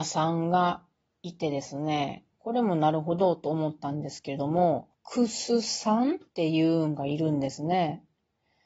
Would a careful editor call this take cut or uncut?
cut